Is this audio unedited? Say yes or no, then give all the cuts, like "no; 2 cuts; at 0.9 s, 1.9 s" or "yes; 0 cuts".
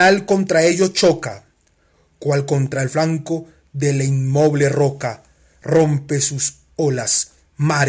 yes; 0 cuts